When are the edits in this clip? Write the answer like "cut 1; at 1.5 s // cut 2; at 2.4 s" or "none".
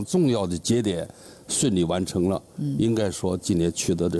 none